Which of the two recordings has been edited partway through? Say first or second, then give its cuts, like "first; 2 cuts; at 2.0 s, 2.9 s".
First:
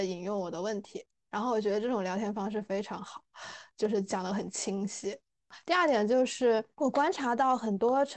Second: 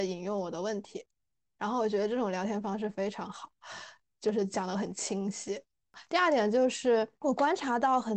first; 2 cuts; at 1.1 s, 3.7 s